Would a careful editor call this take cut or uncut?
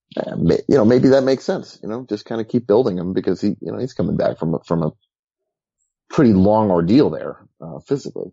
uncut